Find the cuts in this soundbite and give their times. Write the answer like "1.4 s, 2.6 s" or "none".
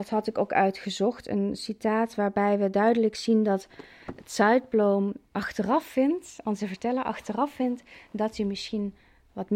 5.3 s